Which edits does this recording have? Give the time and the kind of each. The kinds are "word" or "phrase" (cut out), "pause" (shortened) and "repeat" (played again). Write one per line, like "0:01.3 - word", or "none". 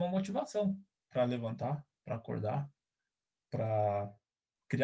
none